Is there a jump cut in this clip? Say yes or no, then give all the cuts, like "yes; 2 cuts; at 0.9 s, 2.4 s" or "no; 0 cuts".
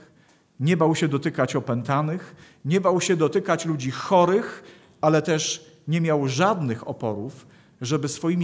no; 0 cuts